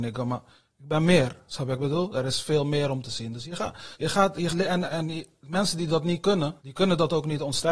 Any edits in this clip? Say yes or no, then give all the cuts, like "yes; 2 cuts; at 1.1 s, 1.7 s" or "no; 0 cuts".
yes; 4 cuts; at 3.9 s, 4.5 s, 4.8 s, 6.6 s